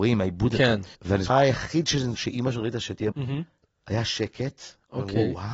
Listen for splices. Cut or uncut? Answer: cut